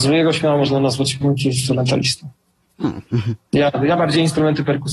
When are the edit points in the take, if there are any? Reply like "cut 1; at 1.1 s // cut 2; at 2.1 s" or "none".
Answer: none